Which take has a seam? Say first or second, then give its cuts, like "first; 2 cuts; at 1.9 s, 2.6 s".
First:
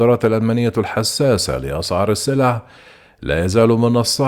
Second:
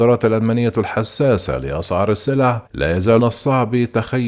second; 2 cuts; at 2.7 s, 3.2 s